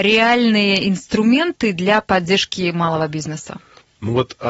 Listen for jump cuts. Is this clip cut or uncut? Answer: uncut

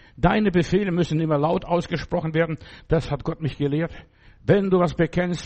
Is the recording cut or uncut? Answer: uncut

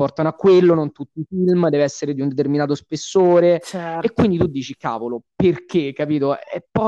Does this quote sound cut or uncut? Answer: uncut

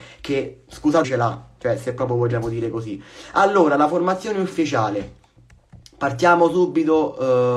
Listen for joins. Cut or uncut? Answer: cut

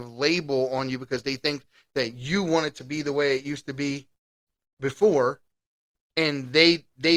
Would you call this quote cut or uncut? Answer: uncut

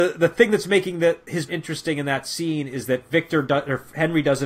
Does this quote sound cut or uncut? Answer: cut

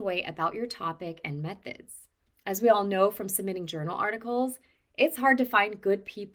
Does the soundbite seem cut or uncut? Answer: cut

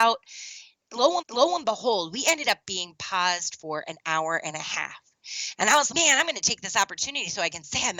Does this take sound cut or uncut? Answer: cut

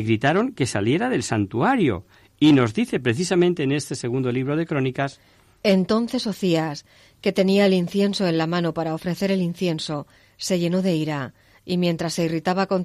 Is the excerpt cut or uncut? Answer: uncut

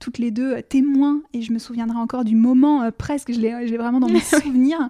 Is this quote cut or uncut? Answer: uncut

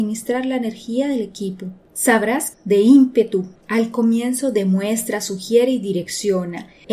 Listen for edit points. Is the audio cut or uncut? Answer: cut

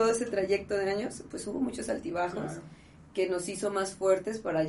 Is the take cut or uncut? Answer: uncut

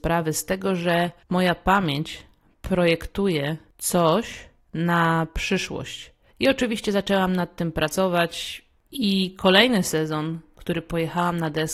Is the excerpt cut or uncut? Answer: uncut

